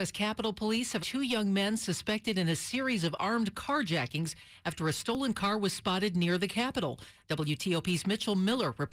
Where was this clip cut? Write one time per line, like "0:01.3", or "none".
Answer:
0:01.0